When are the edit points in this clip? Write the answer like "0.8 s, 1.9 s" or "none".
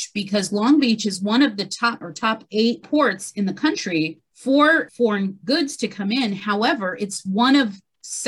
2.0 s